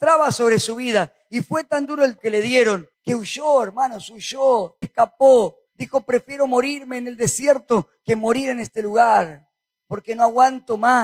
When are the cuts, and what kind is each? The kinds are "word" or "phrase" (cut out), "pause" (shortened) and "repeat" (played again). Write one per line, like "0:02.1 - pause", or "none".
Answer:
0:02.2 - word
0:02.9 - pause
0:04.8 - word
0:05.7 - pause

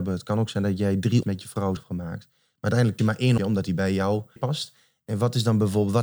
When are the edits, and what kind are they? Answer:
0:01.2 - word
0:01.8 - word
0:03.0 - word
0:03.4 - word
0:04.4 - word

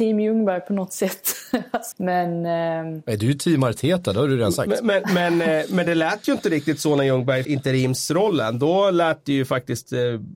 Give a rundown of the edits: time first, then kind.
0:01.9 - word
0:07.4 - phrase

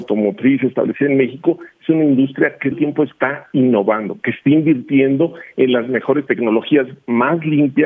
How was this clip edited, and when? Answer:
0:02.7 - word
0:06.3 - word

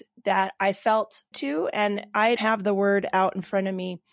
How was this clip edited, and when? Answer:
0:01.3 - word
0:02.4 - word

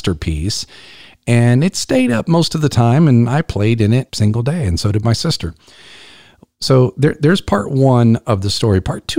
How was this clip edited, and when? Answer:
0:04.1 - word

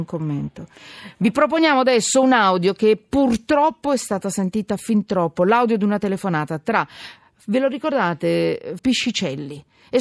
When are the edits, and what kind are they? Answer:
0:08.8 - word

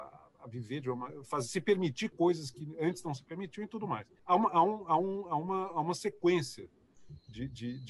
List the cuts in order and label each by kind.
0:04.2 - pause

